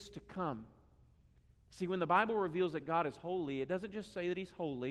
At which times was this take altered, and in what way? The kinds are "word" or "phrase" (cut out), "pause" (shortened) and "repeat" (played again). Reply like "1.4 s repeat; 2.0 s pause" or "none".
none

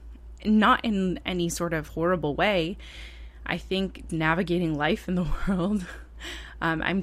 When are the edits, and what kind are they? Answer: 4.1 s word

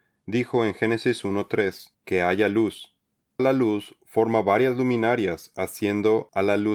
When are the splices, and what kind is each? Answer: 1.9 s pause; 3.4 s word

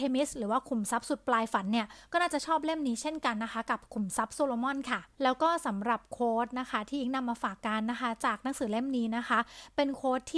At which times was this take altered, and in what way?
5.1 s pause

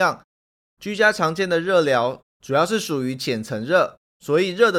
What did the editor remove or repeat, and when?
2.3 s pause

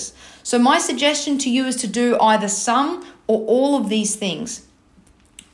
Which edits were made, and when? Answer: none

